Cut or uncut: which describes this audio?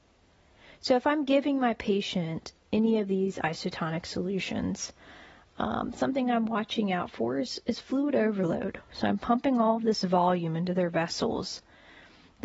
uncut